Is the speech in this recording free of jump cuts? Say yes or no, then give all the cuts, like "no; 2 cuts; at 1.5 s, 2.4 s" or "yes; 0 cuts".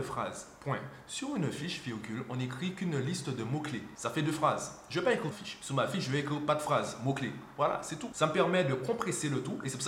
no; 1 cut; at 5.3 s